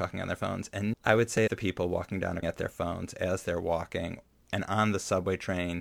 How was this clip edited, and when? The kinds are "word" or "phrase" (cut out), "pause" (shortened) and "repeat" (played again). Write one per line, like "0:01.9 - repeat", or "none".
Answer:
0:00.9 - word
0:01.5 - phrase
0:02.4 - phrase